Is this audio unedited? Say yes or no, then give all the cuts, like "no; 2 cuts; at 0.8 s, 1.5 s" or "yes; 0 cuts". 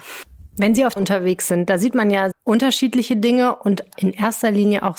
no; 3 cuts; at 1.0 s, 2.3 s, 3.9 s